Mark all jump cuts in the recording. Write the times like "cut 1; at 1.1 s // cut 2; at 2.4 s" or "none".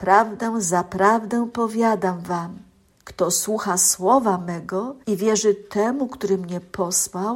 cut 1; at 2.9 s // cut 2; at 5.0 s